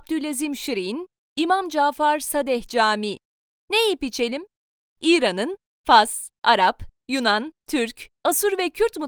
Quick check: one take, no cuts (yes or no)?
yes